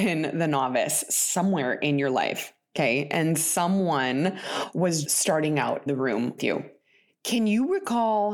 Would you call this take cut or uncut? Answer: cut